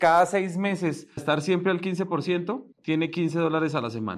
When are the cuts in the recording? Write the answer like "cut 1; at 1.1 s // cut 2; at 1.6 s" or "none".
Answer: cut 1; at 1.2 s // cut 2; at 2.7 s